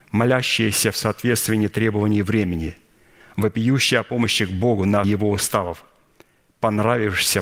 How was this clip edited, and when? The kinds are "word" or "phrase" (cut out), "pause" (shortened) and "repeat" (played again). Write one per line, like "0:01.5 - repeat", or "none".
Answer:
0:05.0 - word